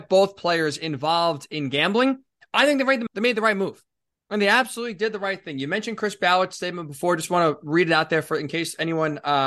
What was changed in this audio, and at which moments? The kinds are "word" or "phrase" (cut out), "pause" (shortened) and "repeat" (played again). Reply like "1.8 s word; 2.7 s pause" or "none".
3.1 s word